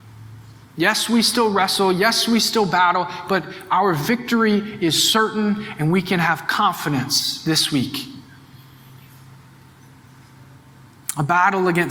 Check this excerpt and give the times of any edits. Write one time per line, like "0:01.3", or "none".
none